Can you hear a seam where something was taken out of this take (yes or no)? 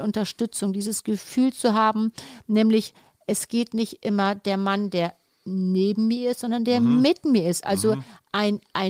no